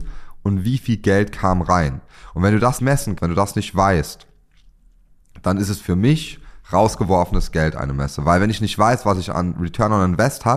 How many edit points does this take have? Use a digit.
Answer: 2